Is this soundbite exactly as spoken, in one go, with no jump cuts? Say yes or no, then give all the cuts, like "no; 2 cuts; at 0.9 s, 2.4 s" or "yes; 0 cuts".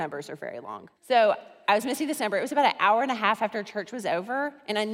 no; 1 cut; at 1.0 s